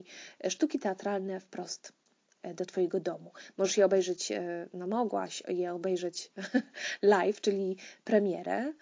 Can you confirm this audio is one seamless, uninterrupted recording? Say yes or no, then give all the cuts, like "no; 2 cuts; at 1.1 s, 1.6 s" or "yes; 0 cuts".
yes; 0 cuts